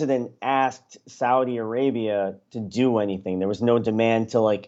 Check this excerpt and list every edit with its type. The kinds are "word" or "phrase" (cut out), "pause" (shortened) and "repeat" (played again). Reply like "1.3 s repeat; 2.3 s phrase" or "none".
none